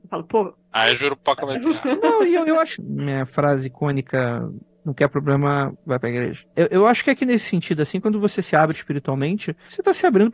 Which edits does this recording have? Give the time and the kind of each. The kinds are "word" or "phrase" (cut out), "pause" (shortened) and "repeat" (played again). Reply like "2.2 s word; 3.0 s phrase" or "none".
2.8 s phrase